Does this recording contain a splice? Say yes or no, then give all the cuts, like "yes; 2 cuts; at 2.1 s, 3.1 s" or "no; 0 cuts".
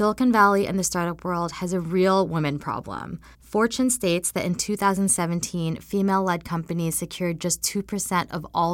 yes; 1 cut; at 3.3 s